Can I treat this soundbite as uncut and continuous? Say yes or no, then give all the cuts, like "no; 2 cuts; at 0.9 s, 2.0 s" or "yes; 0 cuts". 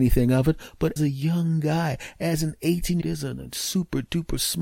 no; 2 cuts; at 1.0 s, 3.0 s